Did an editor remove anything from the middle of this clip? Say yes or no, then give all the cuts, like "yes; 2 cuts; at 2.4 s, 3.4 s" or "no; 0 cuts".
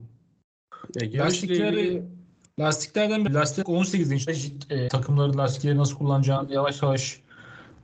yes; 4 cuts; at 3.3 s, 3.6 s, 4.3 s, 4.9 s